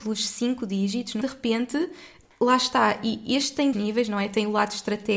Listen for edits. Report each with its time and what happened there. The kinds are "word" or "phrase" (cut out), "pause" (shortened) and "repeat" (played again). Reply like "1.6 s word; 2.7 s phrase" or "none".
1.2 s phrase; 3.7 s word